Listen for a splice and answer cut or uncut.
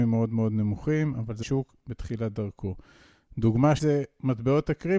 cut